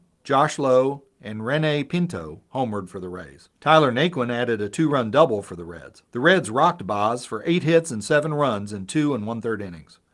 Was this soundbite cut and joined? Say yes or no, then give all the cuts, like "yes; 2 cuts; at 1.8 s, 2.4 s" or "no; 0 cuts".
yes; 2 cuts; at 3.5 s, 6.1 s